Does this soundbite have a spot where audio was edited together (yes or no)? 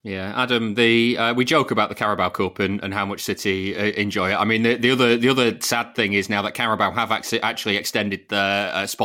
no